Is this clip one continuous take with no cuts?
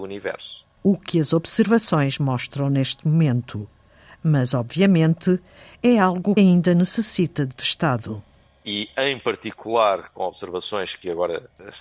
no; 2 cuts; at 6.4 s, 7.5 s

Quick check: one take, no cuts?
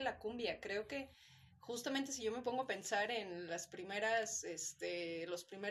yes; 0 cuts

